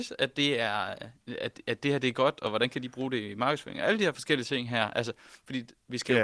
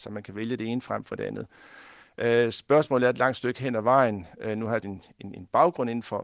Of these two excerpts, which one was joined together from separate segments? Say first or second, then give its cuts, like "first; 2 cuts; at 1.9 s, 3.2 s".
second; 1 cut; at 4.8 s